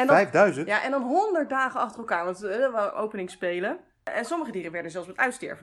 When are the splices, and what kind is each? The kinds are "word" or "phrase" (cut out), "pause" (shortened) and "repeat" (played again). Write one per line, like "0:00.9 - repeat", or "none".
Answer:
none